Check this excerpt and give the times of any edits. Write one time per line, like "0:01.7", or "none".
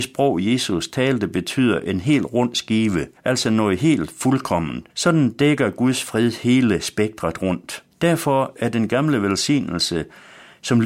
0:03.2
0:04.9
0:07.9